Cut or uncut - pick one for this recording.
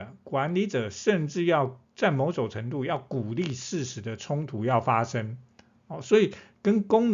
cut